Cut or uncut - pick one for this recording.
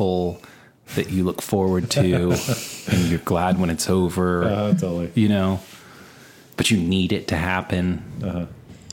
uncut